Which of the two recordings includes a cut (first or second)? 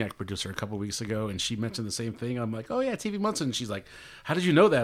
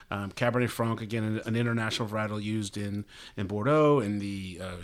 second